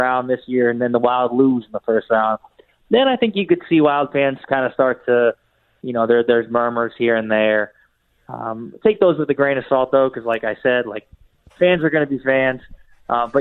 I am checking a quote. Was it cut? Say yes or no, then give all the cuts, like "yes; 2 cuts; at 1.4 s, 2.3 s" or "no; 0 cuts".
no; 0 cuts